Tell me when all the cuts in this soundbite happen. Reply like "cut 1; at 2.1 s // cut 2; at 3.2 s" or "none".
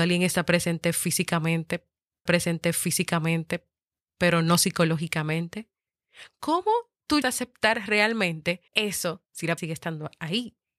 cut 1; at 2.3 s // cut 2; at 7.2 s // cut 3; at 8.7 s // cut 4; at 9.6 s

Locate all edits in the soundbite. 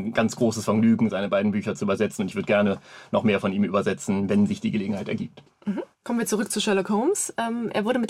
cut 1; at 5.9 s

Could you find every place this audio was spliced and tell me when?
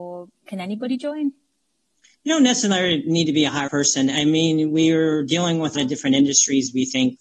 cut 1; at 1.7 s // cut 2; at 3.7 s // cut 3; at 5.7 s

